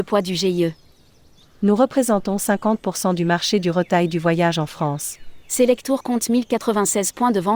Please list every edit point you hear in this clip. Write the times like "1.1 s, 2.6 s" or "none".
none